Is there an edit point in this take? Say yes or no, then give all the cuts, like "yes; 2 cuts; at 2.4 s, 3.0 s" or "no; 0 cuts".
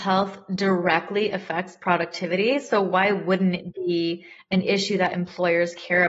no; 0 cuts